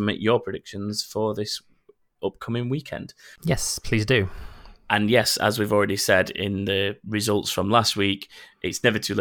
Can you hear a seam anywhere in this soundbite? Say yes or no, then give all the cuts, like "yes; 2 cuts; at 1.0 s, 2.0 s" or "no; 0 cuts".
no; 0 cuts